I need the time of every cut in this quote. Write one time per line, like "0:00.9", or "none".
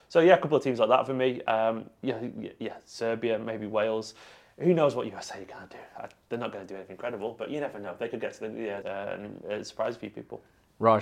0:08.8